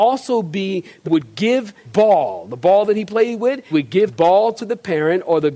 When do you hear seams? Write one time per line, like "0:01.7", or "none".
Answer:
0:01.0
0:01.9
0:03.7
0:04.1